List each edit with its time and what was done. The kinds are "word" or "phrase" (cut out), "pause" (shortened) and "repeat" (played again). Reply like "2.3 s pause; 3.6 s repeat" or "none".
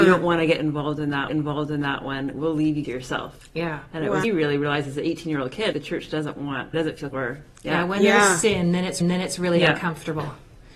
1.3 s repeat; 2.8 s word; 4.2 s phrase; 5.7 s word; 6.7 s word; 7.1 s word; 9.0 s repeat